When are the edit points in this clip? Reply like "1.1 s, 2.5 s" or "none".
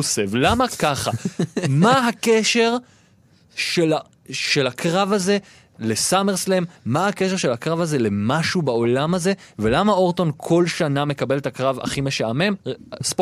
none

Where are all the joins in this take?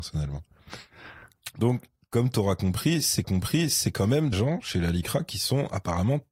2.0 s, 3.2 s, 4.3 s

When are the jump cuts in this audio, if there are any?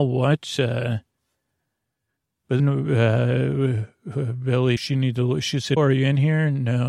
2.6 s, 4.8 s, 5.8 s

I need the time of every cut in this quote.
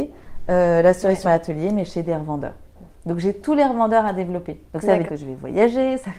1.2 s, 4.7 s, 5.1 s

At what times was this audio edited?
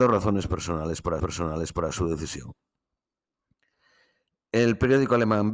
1.2 s

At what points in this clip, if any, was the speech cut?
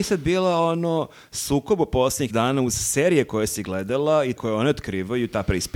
2.3 s, 4.4 s

